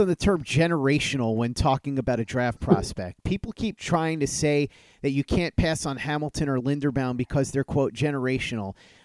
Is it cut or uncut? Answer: uncut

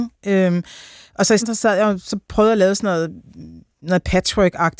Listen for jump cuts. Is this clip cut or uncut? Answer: cut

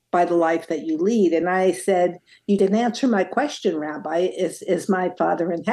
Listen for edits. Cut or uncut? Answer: uncut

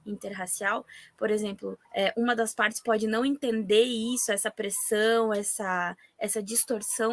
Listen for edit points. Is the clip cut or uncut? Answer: cut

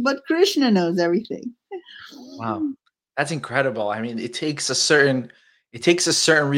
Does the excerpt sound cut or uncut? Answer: uncut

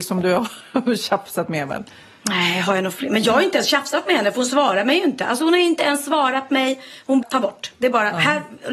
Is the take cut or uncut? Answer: cut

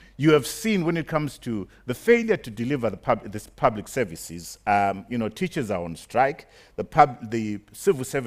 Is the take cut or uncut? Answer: uncut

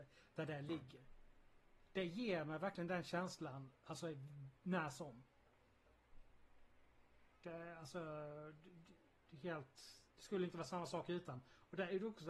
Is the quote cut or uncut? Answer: cut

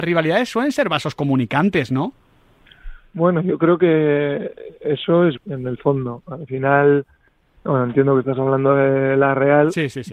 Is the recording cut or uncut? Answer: cut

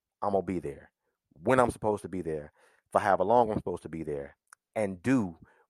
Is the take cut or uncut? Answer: uncut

